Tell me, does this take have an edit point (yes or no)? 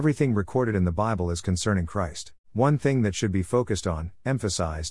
yes